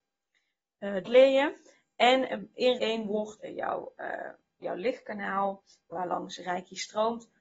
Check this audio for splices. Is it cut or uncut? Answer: cut